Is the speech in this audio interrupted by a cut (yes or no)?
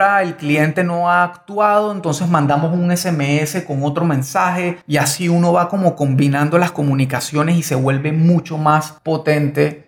yes